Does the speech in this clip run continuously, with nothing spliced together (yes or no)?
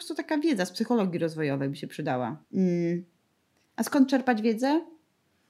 no